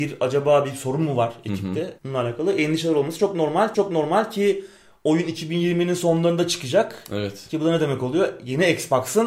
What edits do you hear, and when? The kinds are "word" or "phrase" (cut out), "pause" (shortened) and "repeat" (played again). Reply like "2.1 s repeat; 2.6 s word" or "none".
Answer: 2.0 s pause; 3.7 s repeat